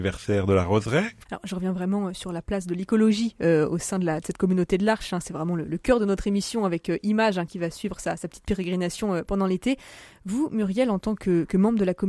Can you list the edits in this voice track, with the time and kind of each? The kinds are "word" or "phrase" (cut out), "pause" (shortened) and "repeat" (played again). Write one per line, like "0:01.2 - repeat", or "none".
none